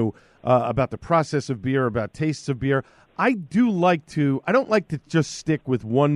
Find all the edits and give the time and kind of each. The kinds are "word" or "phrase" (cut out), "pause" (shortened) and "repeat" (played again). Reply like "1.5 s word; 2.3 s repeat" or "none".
none